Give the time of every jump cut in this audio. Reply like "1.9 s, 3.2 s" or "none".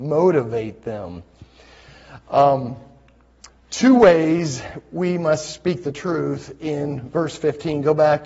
3.5 s